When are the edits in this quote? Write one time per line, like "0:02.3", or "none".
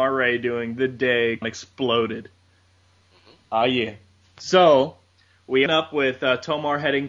0:01.4
0:05.7